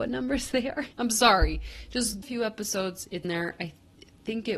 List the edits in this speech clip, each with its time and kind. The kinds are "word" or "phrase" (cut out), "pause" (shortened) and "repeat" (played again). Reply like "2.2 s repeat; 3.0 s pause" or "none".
0.9 s pause; 2.2 s phrase; 3.2 s word